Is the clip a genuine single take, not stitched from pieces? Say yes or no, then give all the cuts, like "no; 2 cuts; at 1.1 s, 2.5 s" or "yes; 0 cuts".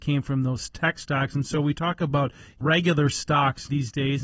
yes; 0 cuts